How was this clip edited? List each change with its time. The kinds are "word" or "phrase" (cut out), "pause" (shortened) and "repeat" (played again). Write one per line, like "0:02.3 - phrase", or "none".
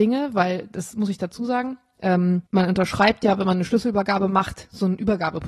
0:02.5 - pause